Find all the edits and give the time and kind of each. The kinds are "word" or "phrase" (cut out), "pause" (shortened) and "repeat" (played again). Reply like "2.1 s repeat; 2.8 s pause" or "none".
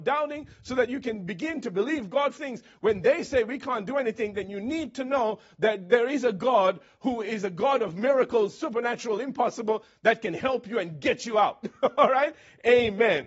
2.4 s word